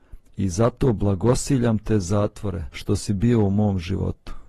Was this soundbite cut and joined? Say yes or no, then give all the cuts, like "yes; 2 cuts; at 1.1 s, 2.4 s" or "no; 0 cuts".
yes; 1 cut; at 2.7 s